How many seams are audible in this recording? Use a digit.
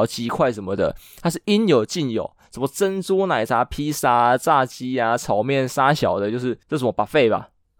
1